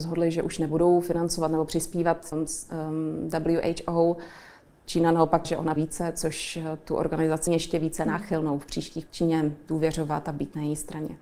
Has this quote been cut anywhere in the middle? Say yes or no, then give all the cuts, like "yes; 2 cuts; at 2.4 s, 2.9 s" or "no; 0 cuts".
yes; 5 cuts; at 2.3 s, 5.4 s, 5.8 s, 7.5 s, 9.1 s